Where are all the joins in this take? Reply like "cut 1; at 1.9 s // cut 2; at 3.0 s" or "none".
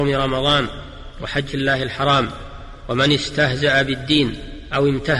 cut 1; at 1.5 s